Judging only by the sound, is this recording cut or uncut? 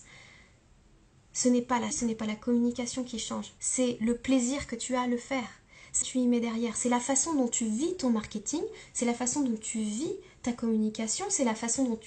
cut